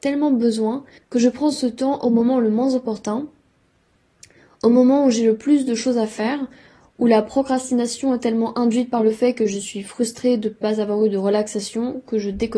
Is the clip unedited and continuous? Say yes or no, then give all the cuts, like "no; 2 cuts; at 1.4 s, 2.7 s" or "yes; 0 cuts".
no; 1 cut; at 1.0 s